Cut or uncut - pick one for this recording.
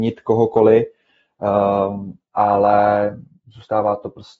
uncut